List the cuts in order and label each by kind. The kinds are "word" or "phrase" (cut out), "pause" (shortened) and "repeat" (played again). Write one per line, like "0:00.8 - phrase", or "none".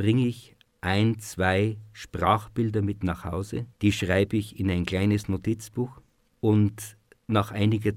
0:03.7 - pause